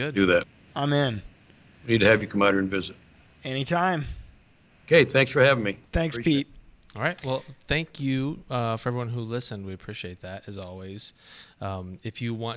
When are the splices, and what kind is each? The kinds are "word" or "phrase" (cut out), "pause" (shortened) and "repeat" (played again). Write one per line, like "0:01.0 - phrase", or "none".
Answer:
none